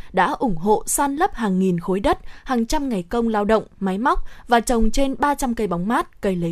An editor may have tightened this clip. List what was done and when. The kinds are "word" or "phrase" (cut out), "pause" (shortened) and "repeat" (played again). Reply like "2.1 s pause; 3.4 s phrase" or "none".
none